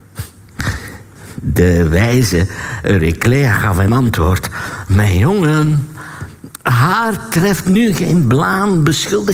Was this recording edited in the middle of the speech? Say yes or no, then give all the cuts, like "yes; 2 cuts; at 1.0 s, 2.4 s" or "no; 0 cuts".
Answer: yes; 1 cut; at 6.6 s